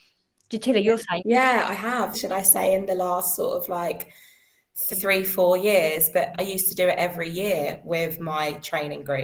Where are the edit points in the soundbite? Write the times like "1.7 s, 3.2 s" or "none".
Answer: 1.2 s, 2.1 s, 4.9 s, 6.3 s